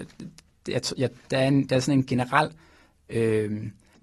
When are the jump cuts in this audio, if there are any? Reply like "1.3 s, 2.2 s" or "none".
none